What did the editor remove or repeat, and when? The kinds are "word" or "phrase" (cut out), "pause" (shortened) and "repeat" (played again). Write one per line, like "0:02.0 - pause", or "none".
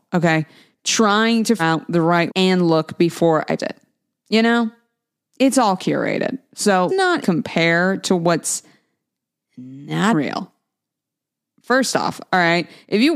0:01.6 - word
0:02.3 - word
0:03.6 - word
0:06.9 - word
0:07.2 - word
0:10.1 - word